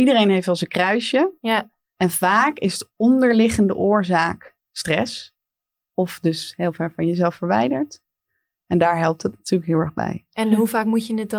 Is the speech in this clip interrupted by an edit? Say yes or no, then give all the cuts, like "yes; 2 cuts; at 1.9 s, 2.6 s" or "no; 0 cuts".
no; 0 cuts